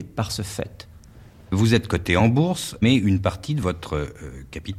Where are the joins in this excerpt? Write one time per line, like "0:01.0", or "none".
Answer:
none